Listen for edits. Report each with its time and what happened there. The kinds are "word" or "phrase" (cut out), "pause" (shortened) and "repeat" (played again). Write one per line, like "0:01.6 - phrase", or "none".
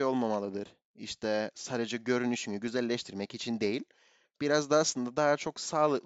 none